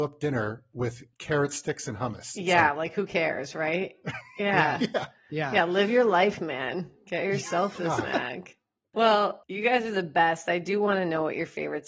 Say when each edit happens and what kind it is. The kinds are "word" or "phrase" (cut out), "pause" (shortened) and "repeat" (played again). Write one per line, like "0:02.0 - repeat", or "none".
none